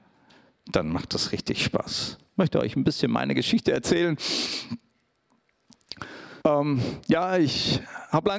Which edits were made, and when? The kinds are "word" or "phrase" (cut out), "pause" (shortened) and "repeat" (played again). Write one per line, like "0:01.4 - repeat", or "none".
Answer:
0:06.4 - pause